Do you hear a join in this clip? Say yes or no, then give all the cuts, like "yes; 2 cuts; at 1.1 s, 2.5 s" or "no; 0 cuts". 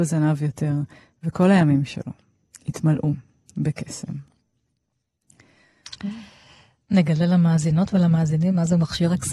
no; 0 cuts